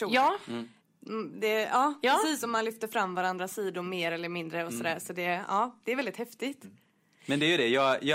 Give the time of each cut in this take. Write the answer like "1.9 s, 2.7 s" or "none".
none